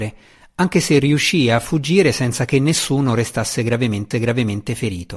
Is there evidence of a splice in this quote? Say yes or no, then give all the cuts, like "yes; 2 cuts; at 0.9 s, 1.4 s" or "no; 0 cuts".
yes; 1 cut; at 4.1 s